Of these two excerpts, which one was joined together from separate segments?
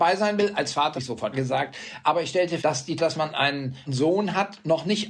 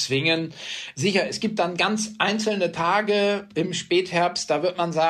first; 5 cuts; at 0.9 s, 1.3 s, 2.6 s, 3.0 s, 3.9 s

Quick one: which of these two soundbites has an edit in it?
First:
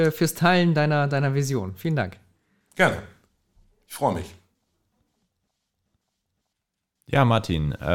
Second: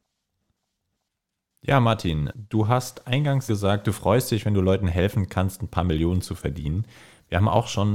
second; 2 cuts; at 2.3 s, 3.5 s

